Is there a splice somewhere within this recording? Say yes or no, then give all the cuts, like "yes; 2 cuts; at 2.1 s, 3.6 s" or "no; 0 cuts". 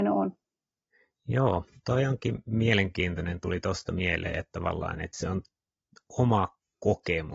no; 0 cuts